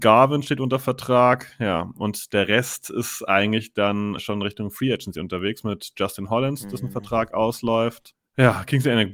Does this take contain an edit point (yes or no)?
yes